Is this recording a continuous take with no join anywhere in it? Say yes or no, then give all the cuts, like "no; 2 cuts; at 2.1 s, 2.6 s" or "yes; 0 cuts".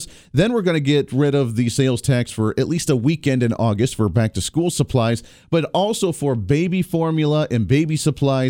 yes; 0 cuts